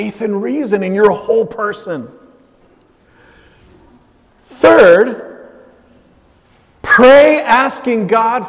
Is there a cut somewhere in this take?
no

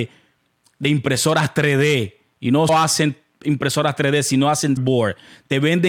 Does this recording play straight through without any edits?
no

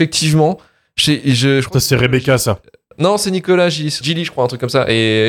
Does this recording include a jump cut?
yes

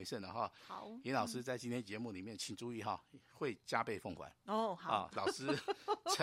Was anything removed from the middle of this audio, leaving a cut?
no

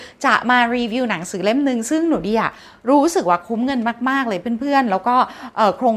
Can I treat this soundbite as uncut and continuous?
yes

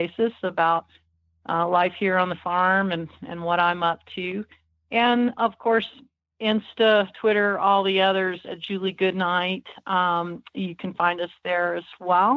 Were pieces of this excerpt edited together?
yes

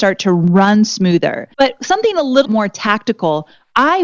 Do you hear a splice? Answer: yes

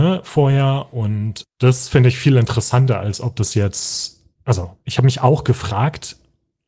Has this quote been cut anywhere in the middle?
no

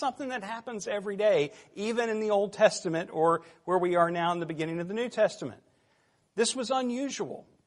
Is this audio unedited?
yes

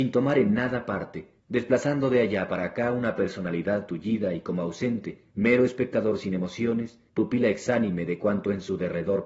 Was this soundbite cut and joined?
yes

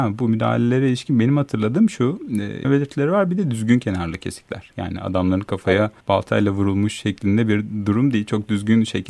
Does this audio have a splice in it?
yes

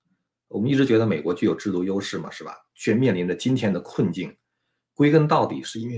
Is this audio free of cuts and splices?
yes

